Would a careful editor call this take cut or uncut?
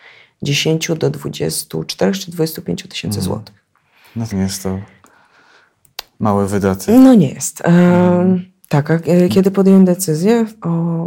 cut